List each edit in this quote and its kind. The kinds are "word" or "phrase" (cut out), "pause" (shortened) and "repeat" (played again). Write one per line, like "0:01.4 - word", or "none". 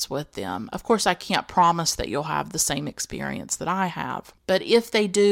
none